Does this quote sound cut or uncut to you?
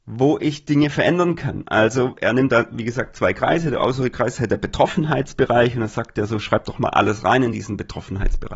uncut